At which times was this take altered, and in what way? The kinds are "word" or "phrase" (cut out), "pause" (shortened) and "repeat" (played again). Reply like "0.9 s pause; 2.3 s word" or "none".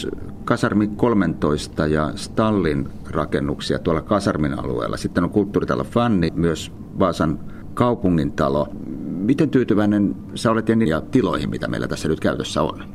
6.3 s word; 10.9 s phrase